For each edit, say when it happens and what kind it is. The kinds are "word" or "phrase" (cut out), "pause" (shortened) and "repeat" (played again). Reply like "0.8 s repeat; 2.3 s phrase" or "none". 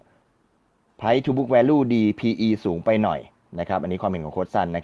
none